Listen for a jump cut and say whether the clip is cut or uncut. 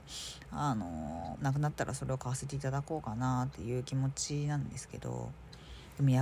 cut